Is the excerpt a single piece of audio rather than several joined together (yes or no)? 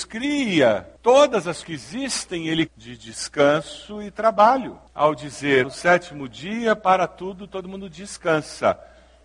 no